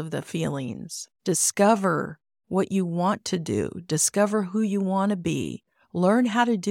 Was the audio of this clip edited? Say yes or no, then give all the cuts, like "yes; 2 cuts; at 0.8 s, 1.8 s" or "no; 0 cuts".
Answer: yes; 1 cut; at 1.2 s